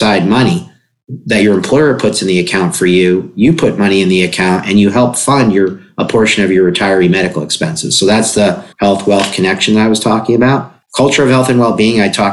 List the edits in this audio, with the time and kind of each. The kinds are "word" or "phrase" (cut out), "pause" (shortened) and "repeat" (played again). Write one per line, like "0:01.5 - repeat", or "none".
0:08.7 - pause
0:10.8 - pause